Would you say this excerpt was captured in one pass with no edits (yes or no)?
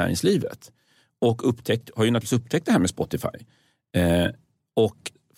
yes